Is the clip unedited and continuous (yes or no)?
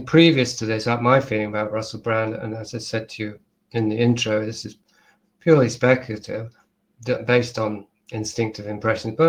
yes